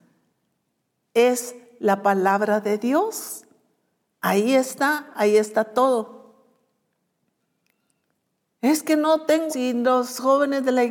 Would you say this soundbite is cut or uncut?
cut